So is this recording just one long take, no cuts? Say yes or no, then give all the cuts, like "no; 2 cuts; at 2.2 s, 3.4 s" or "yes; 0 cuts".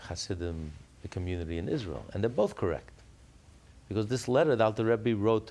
yes; 0 cuts